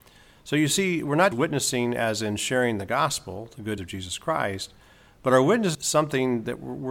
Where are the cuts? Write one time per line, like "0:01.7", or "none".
0:01.3
0:03.8
0:05.7